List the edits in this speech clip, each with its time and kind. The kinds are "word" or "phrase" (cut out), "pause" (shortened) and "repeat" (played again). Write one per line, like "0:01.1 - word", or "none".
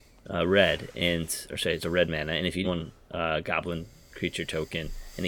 0:01.8 - word
0:02.6 - phrase